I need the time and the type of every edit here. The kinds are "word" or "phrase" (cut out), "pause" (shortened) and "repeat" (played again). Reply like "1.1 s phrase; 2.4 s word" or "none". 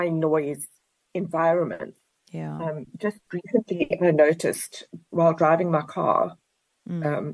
none